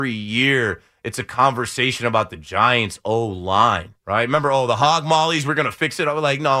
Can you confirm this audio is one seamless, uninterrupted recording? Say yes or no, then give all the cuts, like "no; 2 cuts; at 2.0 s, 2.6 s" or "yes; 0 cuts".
no; 1 cut; at 4.0 s